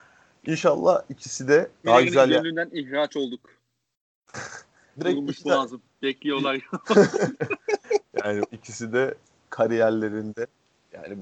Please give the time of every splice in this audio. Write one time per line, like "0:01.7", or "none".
0:01.8
0:05.0
0:08.5
0:09.2